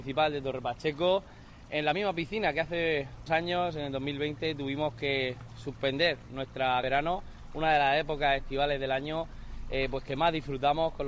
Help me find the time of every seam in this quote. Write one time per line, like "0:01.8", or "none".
0:03.3
0:06.8